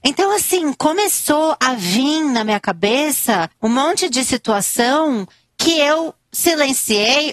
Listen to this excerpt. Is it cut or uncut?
uncut